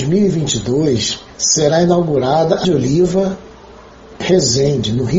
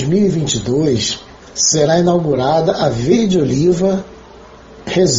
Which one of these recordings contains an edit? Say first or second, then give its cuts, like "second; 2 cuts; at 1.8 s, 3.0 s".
first; 2 cuts; at 1.3 s, 2.6 s